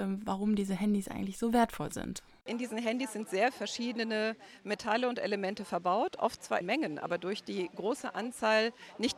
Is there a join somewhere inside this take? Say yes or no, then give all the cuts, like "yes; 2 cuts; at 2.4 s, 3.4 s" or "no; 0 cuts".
yes; 2 cuts; at 3.5 s, 6.6 s